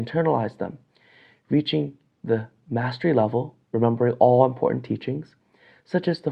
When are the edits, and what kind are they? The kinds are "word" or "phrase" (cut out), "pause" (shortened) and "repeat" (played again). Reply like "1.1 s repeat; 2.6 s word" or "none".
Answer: 3.6 s pause